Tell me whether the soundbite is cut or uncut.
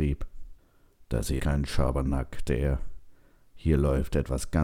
cut